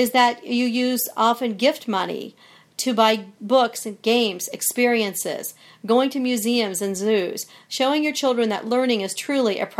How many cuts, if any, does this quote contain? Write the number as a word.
zero